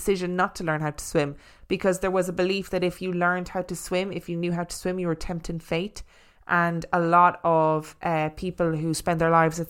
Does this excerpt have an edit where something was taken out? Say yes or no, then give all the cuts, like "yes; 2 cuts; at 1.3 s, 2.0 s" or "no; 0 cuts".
no; 0 cuts